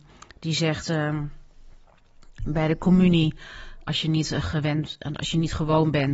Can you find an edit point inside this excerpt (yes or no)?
yes